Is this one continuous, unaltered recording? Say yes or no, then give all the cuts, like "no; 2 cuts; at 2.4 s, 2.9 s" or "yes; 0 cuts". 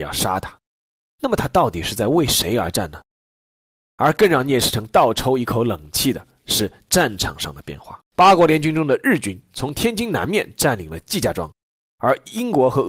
no; 1 cut; at 8.0 s